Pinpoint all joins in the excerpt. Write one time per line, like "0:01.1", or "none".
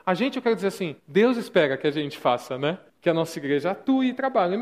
0:01.0
0:02.9